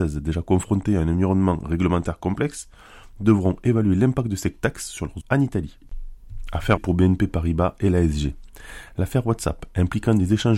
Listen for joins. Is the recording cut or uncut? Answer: cut